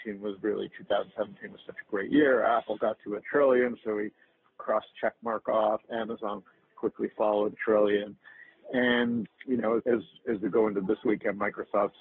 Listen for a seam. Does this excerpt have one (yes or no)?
yes